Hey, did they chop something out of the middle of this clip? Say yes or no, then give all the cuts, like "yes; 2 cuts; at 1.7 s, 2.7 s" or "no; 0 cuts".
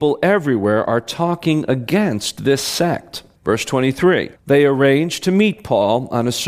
yes; 2 cuts; at 3.3 s, 4.3 s